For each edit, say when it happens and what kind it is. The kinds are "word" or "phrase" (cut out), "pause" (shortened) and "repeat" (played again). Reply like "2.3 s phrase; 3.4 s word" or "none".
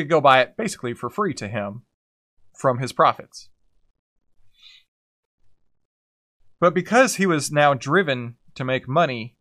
none